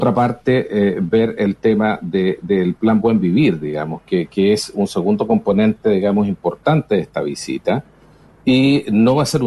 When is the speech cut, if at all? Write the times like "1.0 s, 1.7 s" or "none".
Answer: none